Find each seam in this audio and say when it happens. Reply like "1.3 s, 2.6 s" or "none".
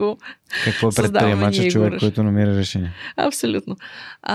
none

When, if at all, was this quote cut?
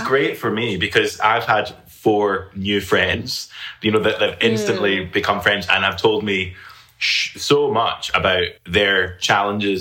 8.6 s

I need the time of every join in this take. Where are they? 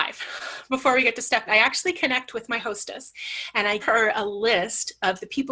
1.5 s, 3.8 s

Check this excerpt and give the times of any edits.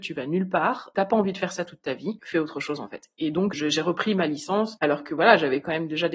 2.2 s, 3.5 s

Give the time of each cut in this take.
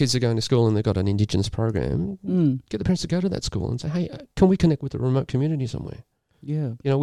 none

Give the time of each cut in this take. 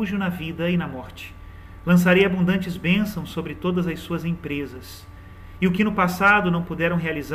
none

